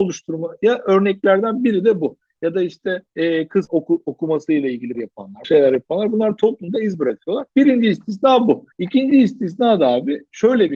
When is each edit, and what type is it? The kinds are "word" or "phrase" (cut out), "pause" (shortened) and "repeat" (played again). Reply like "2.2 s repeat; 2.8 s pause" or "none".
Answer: 3.1 s pause; 3.7 s word; 4.9 s word; 5.4 s word; 7.5 s pause; 8.7 s pause